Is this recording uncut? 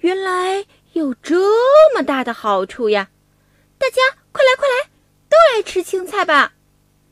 yes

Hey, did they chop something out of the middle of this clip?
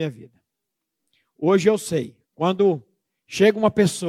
yes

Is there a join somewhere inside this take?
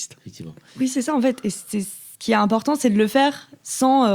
no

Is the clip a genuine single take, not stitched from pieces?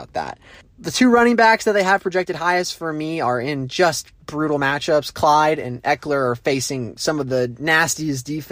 yes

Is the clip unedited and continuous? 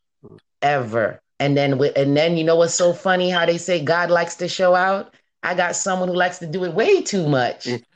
no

